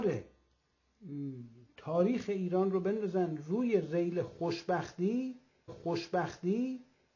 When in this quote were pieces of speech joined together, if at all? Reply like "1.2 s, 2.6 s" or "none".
5.7 s